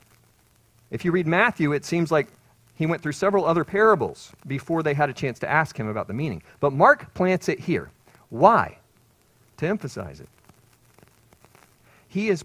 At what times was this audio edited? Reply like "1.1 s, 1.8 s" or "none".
none